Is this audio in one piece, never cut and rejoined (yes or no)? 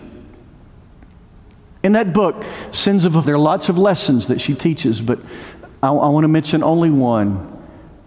no